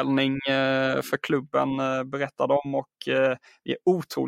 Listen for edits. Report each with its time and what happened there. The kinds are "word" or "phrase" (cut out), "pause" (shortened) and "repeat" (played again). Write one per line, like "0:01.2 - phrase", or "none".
none

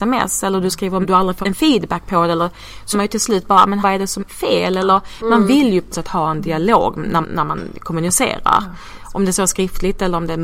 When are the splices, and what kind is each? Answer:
0:01.0 - word
0:01.4 - word
0:02.9 - word
0:03.8 - word
0:04.2 - word
0:05.9 - word
0:07.2 - word

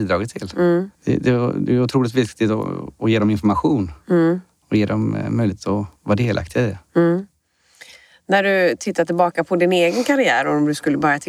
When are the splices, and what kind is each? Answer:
0:00.9 - pause
0:06.0 - pause

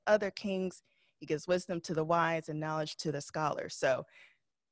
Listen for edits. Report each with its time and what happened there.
none

